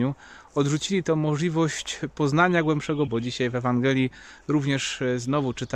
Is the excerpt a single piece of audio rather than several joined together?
no; 1 cut; at 3.1 s

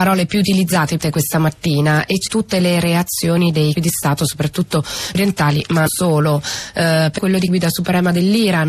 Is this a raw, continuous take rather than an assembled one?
no; 7 cuts; at 1.0 s, 2.3 s, 3.7 s, 5.1 s, 5.9 s, 7.2 s, 7.5 s

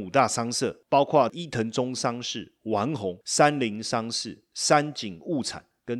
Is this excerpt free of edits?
yes; 0 cuts

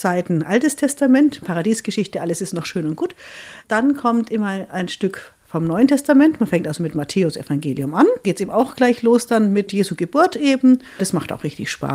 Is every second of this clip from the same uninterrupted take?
yes; 0 cuts

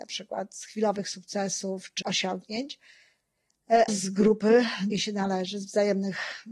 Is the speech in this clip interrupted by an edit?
yes; 3 cuts; at 2.0 s, 3.9 s, 4.9 s

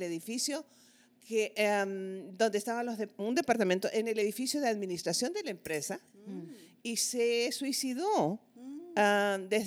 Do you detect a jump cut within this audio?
no; 0 cuts

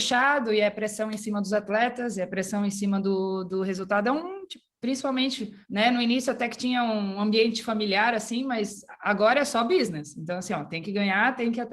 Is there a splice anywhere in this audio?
yes; 1 cut; at 5.6 s

